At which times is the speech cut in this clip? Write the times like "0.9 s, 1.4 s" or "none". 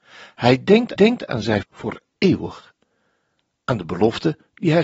1.0 s, 1.6 s